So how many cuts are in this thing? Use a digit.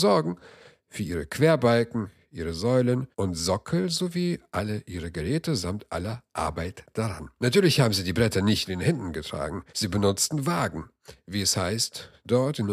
3